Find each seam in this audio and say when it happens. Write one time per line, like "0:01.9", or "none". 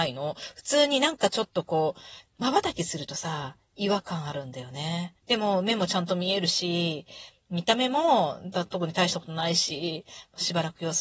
0:05.2